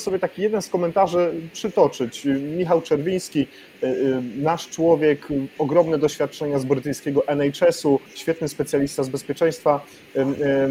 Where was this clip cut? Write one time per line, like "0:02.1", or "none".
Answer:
0:08.1